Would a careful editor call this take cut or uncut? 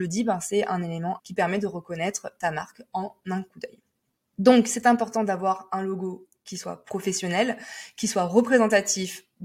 cut